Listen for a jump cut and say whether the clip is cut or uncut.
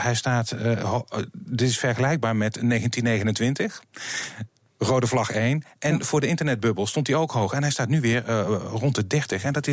uncut